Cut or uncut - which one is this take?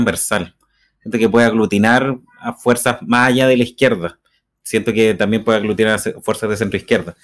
uncut